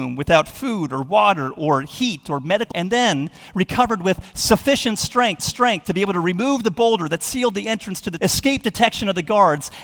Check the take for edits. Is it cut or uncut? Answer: cut